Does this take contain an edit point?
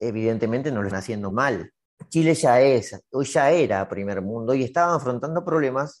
yes; 2 cuts; at 0.9 s, 1.3 s

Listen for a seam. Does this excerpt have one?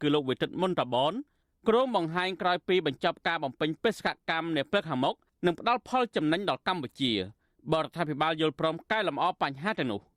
no; 0 cuts

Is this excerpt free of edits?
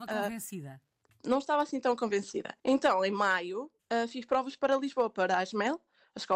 no; 2 cuts; at 2.6 s, 3.8 s

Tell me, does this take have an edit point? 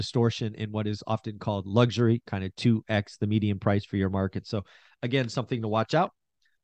no; 0 cuts

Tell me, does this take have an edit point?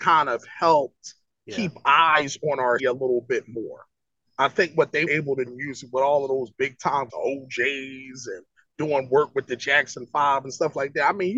yes; 4 cuts; at 2.8 s, 5.1 s, 5.5 s, 7.1 s

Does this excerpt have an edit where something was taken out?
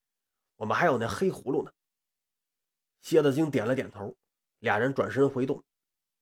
no; 0 cuts

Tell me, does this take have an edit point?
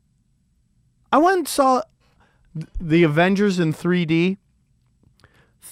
no; 0 cuts

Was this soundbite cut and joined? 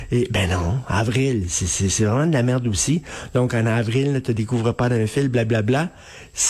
no; 0 cuts

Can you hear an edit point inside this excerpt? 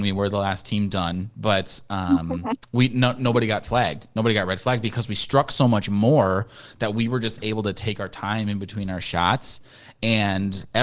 no; 0 cuts

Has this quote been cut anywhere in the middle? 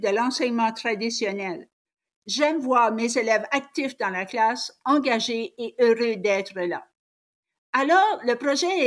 no; 0 cuts

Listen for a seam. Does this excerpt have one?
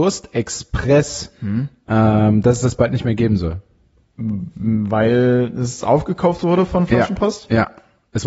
no; 0 cuts

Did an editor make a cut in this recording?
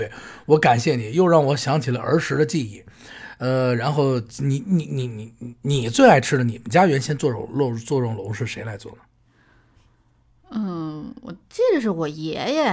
no; 0 cuts

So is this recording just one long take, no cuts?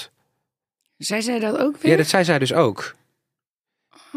yes; 0 cuts

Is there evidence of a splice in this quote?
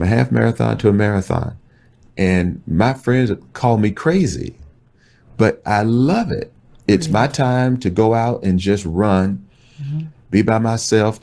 no; 0 cuts

